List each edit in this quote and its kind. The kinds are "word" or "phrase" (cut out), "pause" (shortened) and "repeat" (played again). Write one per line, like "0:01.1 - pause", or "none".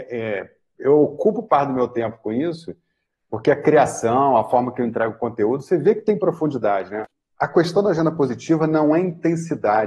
none